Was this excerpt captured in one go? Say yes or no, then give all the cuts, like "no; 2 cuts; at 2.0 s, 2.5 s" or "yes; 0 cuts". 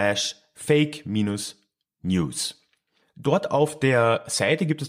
yes; 0 cuts